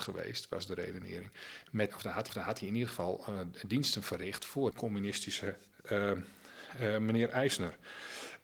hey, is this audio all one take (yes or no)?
no